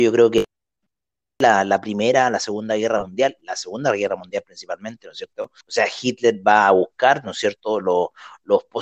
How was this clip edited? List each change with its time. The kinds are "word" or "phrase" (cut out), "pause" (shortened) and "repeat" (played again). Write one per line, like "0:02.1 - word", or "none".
0:05.6 - pause